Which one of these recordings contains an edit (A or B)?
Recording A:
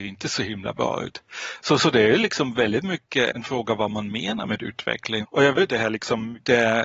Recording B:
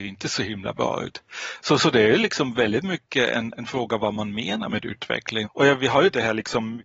A